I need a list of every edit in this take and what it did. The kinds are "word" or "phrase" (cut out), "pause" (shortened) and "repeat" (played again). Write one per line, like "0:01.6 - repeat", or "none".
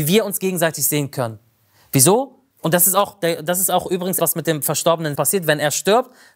0:02.5 - pause
0:04.2 - word
0:05.1 - word

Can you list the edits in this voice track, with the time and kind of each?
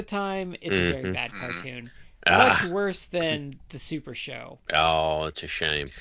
0:04.6 - pause

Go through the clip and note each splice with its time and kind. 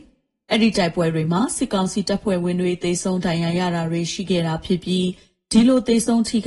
none

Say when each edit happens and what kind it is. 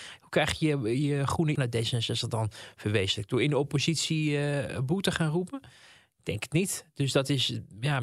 0:01.5 - word

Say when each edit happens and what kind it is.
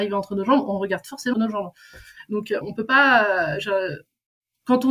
0:01.3 - word
0:02.6 - word

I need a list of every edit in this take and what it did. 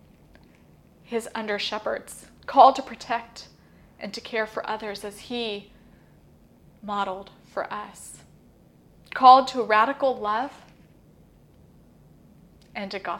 none

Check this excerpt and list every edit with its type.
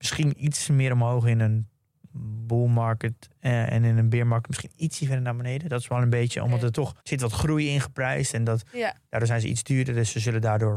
0:07.0 - pause

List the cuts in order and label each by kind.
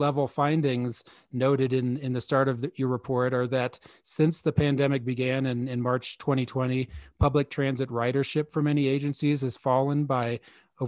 none

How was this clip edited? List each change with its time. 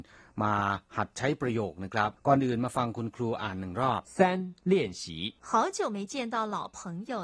0:02.2 - pause
0:04.0 - pause
0:04.6 - pause
0:05.4 - pause

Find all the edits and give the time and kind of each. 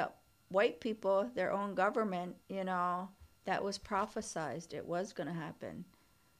0:02.4 - pause
0:03.3 - pause

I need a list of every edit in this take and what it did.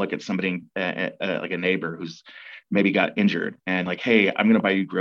none

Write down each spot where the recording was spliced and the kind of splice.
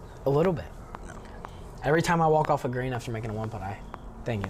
none

